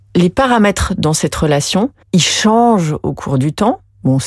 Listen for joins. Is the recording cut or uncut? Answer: cut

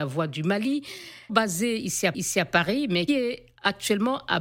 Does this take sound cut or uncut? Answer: cut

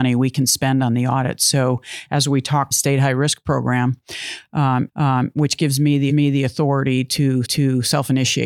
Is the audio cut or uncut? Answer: cut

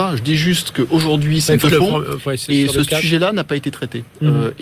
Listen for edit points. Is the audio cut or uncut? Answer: cut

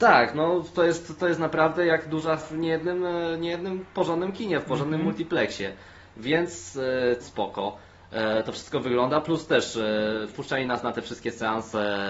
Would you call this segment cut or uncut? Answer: cut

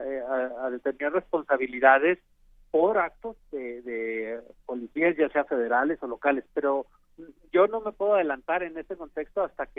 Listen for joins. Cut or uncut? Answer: uncut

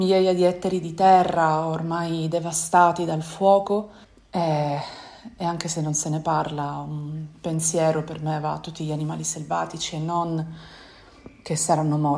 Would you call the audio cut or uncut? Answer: cut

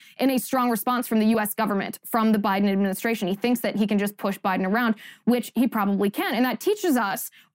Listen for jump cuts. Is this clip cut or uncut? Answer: uncut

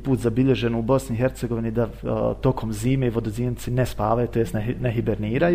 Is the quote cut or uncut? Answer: uncut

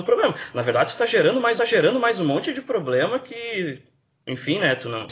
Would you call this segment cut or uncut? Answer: cut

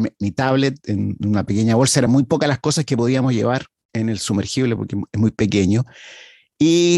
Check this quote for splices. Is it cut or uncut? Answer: uncut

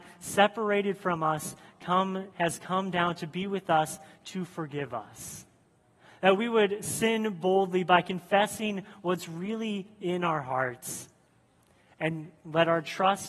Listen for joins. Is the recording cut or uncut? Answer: uncut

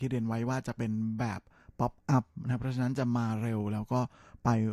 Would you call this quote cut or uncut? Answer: uncut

